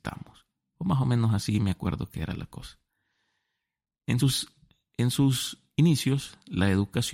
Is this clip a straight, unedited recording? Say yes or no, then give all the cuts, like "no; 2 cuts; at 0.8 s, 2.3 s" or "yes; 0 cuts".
yes; 0 cuts